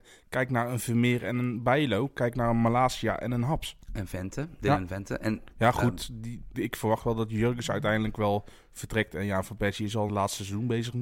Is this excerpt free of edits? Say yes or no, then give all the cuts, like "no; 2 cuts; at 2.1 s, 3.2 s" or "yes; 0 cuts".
no; 2 cuts; at 6.5 s, 10.1 s